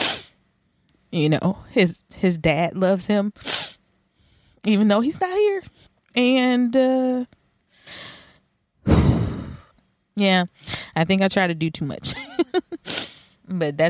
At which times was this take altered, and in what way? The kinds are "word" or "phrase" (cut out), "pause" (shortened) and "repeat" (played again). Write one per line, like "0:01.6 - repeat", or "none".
none